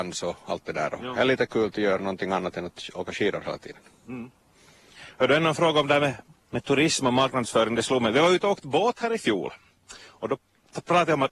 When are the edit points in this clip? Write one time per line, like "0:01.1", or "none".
0:06.3